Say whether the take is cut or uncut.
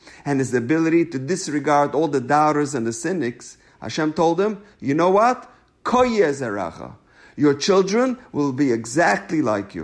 uncut